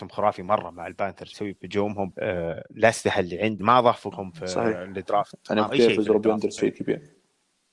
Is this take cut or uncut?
cut